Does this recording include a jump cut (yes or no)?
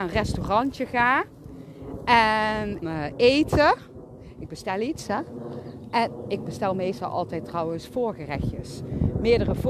yes